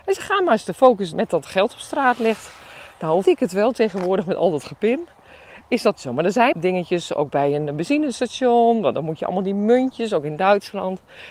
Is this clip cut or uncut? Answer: cut